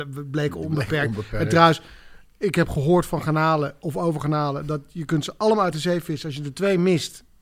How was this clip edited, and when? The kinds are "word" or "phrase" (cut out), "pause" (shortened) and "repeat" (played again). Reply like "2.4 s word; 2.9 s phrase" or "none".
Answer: none